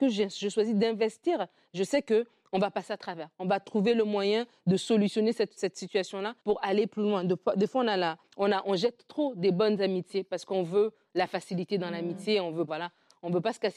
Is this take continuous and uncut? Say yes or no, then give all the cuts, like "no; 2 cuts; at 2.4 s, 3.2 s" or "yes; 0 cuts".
no; 5 cuts; at 5.6 s, 6.4 s, 8.3 s, 8.6 s, 12.7 s